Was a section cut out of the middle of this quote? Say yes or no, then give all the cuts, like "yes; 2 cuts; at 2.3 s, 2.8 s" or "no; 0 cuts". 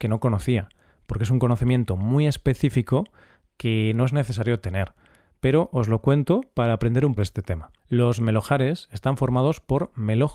yes; 2 cuts; at 7.2 s, 7.8 s